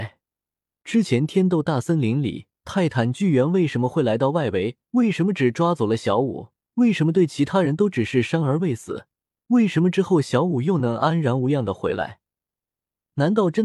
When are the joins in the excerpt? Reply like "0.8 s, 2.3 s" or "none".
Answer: 2.6 s, 4.8 s, 6.6 s, 9.3 s